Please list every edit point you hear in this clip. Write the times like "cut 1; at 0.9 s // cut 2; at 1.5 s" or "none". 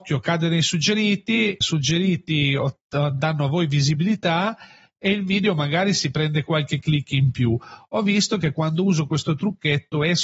cut 1; at 1.6 s